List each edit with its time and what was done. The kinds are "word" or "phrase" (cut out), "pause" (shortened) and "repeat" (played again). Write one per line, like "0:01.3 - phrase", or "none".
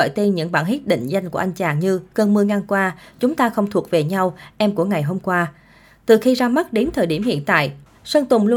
none